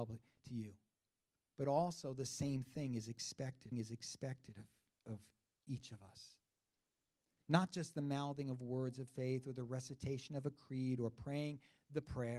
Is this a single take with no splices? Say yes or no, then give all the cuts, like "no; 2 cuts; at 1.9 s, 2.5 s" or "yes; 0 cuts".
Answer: no; 1 cut; at 3.7 s